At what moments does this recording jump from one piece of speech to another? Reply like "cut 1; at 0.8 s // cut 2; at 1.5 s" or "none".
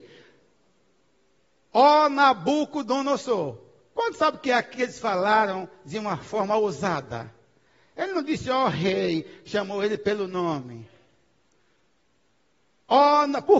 none